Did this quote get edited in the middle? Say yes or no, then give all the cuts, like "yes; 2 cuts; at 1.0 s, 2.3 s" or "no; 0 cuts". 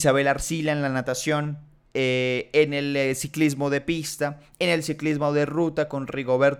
yes; 1 cut; at 1.9 s